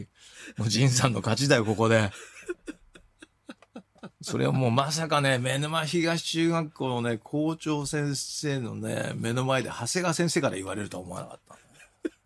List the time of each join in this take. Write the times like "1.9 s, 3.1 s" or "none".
none

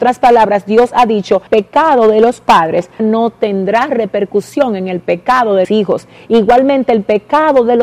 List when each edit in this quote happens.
1.5 s, 3.0 s, 5.6 s

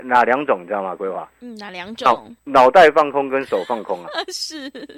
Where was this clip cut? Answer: 2.4 s

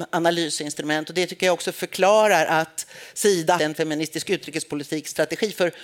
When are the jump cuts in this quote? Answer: 3.6 s

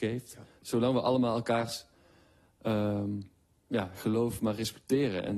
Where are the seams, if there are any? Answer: none

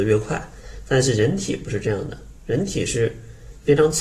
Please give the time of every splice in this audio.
2.4 s

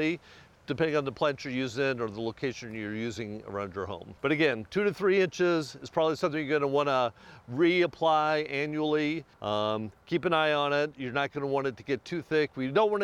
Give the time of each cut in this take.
4.2 s, 9.3 s

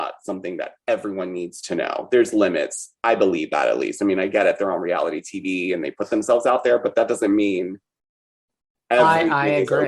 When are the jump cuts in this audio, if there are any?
none

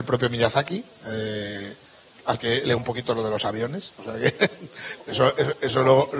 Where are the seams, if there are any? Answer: 2.8 s

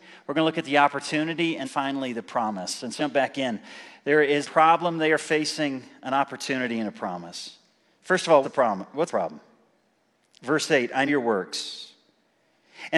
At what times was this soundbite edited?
1.6 s, 3.0 s, 4.4 s, 8.4 s, 9.1 s, 11.1 s

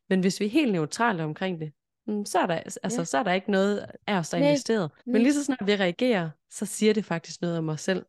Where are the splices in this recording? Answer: 4.0 s, 5.0 s

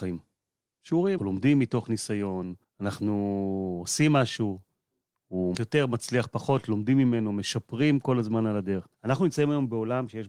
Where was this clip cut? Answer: 1.2 s, 2.6 s, 5.5 s, 8.9 s

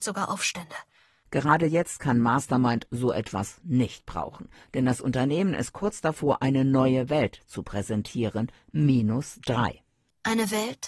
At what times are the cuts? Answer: none

